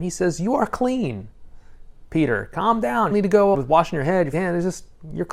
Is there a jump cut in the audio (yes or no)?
yes